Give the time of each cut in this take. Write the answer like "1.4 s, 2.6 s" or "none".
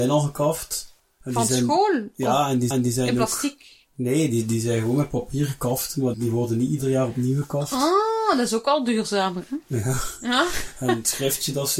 1.0 s, 2.7 s, 6.1 s